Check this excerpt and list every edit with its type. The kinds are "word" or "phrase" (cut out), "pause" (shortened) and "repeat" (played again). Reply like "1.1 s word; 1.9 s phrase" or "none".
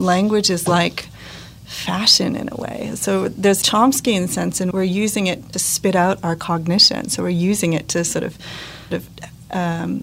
3.6 s word; 4.7 s word; 5.5 s word; 8.9 s word